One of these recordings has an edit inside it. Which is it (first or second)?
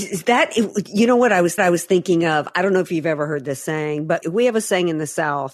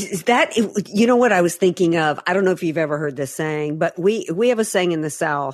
first